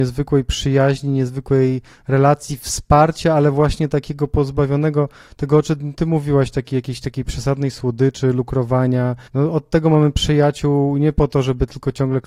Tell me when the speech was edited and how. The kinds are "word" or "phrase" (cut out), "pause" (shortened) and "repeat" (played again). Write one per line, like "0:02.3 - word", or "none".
0:09.2 - pause